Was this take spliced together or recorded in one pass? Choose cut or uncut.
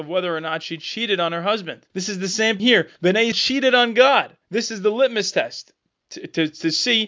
cut